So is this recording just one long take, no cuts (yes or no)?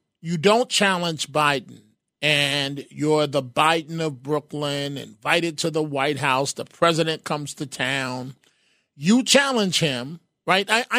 yes